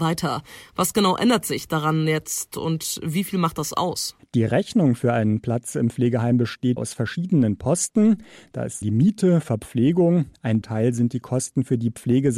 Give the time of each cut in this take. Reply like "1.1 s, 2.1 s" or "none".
6.8 s, 8.8 s, 10.6 s